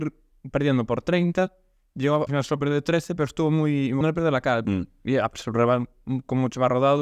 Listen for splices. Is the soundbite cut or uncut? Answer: cut